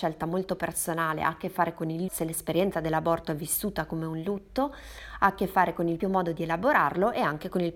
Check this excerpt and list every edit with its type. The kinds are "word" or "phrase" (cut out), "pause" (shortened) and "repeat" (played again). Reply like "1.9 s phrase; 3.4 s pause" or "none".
2.1 s word; 6.0 s word